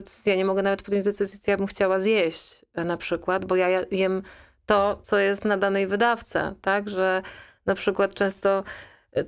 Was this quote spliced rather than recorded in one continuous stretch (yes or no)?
no